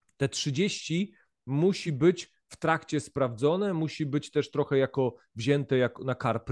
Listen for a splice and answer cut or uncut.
uncut